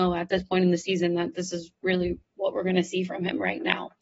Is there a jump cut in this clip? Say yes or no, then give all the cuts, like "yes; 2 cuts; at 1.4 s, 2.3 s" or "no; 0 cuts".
no; 0 cuts